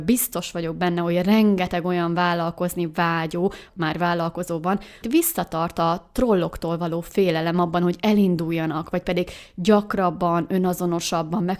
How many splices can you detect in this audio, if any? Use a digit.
2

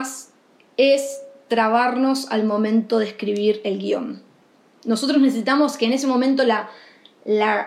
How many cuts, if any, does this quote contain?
0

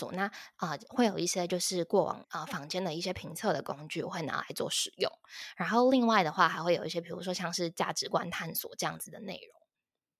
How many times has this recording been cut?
1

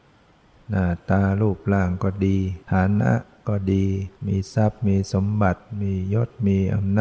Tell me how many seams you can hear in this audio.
2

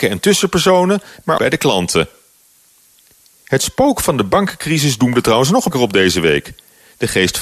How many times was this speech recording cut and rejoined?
2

